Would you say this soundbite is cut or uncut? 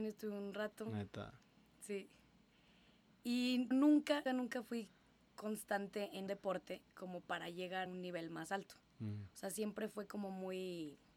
cut